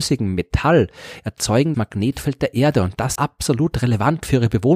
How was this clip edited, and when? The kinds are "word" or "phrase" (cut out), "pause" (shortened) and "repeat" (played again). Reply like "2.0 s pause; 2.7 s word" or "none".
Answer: 1.7 s word; 3.1 s word